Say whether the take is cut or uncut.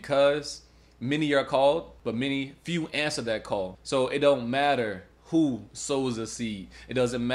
uncut